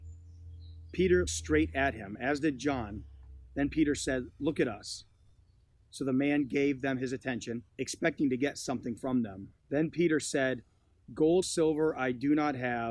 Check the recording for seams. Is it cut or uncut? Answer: cut